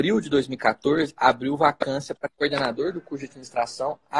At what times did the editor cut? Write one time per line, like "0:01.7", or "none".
none